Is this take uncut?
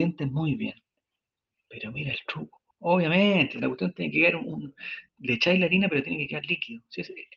no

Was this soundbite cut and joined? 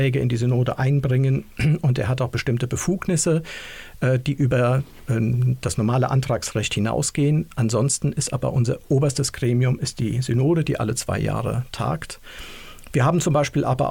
no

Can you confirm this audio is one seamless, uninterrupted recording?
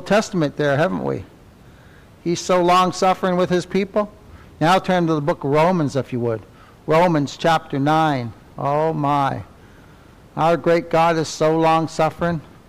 yes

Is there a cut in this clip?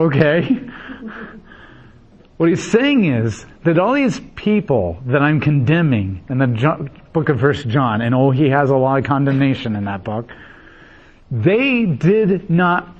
no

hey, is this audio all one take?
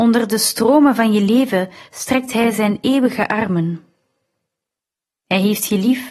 yes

